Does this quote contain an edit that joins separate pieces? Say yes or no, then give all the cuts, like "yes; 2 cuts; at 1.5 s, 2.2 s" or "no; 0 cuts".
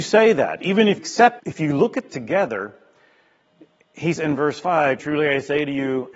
yes; 5 cuts; at 1.0 s, 1.4 s, 2.1 s, 4.1 s, 5.0 s